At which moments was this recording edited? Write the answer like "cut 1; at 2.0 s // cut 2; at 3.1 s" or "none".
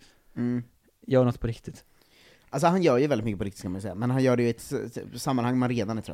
none